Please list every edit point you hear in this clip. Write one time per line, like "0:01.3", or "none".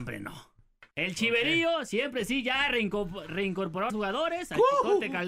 0:00.9
0:03.9